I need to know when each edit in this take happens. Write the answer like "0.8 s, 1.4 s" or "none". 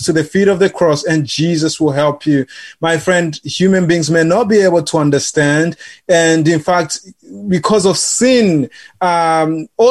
none

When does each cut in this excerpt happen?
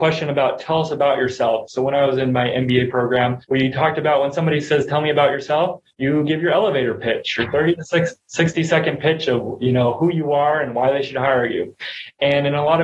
3.4 s, 5.9 s

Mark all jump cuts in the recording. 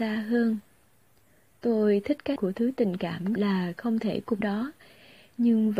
2.4 s, 3.4 s, 4.4 s

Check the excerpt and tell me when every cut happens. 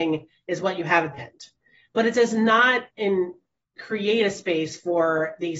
1.2 s, 2.9 s

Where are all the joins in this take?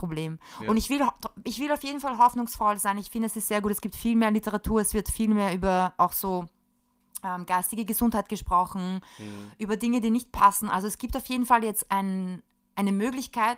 none

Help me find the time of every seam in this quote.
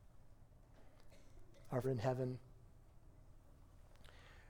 1.8 s

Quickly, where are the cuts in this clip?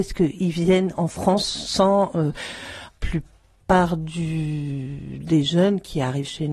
2.9 s

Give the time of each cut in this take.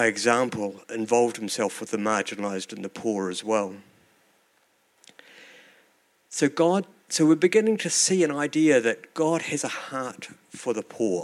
none

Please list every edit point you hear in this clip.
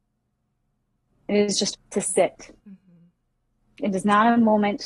1.7 s, 2.6 s

